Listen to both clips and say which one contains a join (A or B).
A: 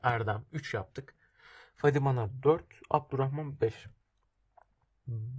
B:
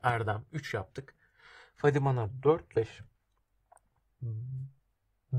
B